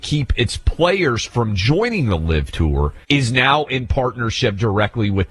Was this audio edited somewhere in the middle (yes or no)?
yes